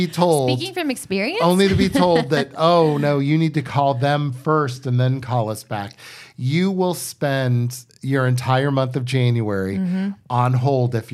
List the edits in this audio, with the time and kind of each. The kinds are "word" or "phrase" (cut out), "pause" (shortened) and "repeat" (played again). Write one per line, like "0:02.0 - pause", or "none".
0:07.9 - pause